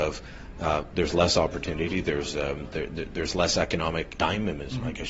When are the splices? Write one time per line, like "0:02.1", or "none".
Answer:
0:04.1